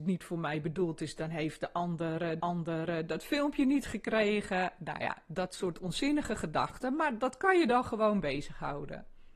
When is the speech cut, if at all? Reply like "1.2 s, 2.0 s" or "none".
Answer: 2.4 s